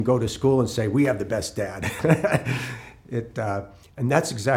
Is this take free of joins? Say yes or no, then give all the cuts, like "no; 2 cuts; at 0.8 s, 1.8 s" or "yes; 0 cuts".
yes; 0 cuts